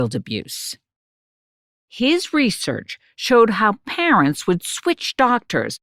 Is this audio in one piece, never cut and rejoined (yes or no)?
yes